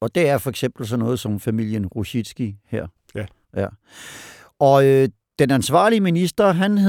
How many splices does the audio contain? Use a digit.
0